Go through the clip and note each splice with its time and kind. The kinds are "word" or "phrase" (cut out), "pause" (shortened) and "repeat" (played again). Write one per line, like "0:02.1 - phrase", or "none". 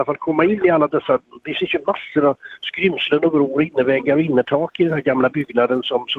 none